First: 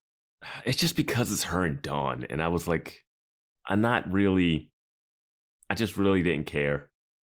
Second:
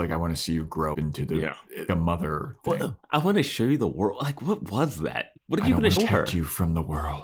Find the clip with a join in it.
second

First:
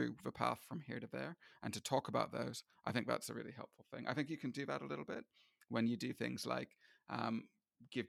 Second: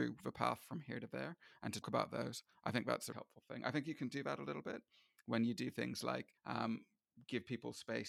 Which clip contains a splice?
second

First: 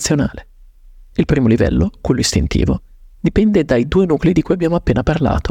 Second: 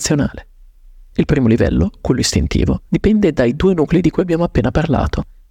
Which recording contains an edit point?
second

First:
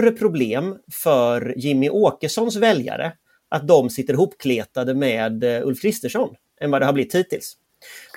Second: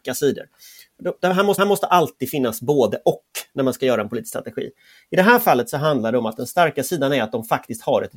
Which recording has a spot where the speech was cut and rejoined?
second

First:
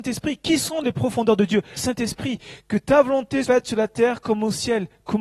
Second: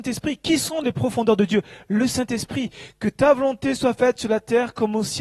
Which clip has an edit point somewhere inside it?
first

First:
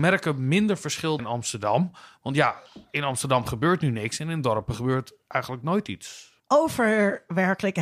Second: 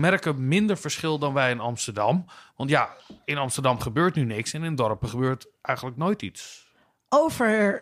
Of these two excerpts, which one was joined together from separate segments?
first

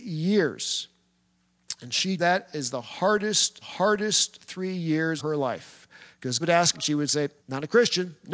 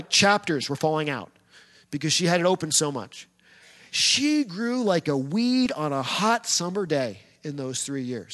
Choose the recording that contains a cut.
first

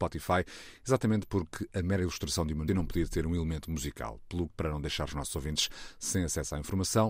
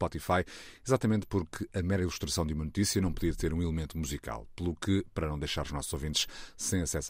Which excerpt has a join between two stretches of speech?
first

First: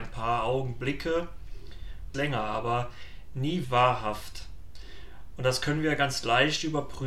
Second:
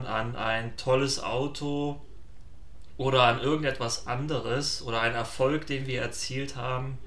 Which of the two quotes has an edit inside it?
first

